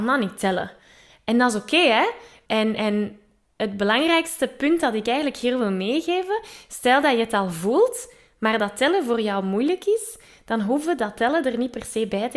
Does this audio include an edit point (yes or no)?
no